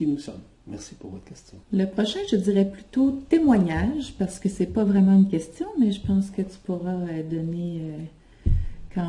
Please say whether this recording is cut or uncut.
cut